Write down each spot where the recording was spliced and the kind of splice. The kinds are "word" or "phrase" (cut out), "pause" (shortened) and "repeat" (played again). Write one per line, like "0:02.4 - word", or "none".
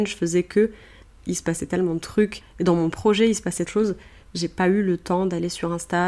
0:03.7 - phrase